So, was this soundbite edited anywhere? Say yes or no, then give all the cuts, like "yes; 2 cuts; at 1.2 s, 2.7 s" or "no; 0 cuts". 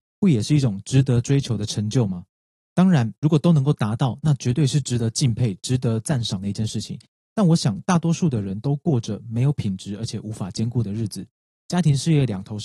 no; 0 cuts